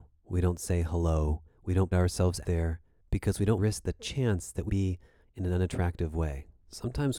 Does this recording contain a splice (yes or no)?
yes